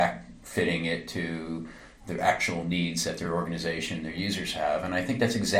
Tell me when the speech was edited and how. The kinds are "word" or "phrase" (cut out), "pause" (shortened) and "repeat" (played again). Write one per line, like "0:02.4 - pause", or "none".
none